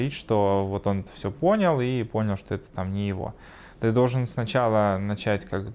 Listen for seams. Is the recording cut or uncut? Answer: cut